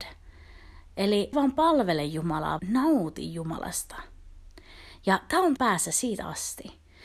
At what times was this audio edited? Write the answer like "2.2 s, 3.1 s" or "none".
1.3 s, 2.6 s, 5.6 s